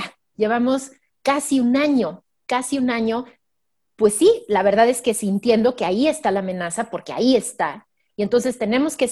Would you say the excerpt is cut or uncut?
uncut